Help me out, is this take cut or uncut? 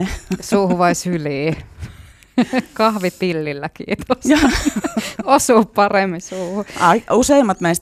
uncut